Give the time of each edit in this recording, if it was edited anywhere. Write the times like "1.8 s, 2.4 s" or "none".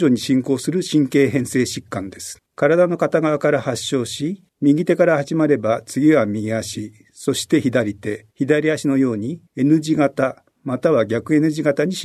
2.5 s, 4.5 s, 8.3 s, 9.5 s

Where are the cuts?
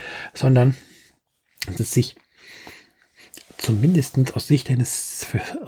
1.8 s

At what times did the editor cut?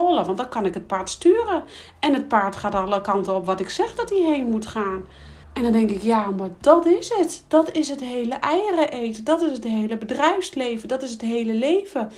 5.4 s

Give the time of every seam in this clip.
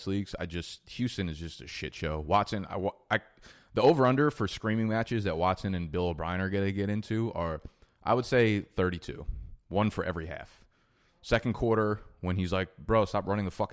none

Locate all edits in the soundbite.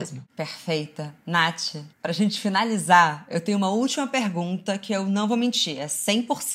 1.9 s

